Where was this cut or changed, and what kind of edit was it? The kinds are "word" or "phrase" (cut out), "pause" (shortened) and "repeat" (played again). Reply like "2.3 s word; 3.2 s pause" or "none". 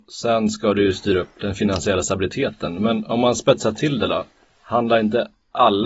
none